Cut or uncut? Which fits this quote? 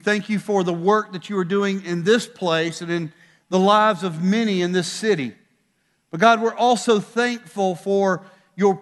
uncut